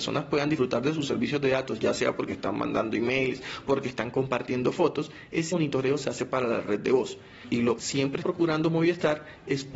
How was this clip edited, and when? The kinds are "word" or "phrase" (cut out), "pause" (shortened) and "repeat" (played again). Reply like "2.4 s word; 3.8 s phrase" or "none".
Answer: 5.5 s word; 7.8 s word; 8.2 s word